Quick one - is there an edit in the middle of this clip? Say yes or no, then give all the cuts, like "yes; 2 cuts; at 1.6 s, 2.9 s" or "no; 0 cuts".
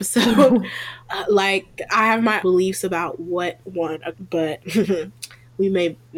yes; 5 cuts; at 1.1 s, 2.4 s, 3.6 s, 4.1 s, 4.6 s